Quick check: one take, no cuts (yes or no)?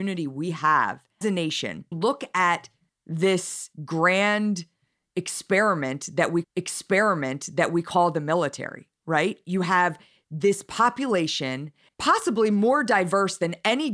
no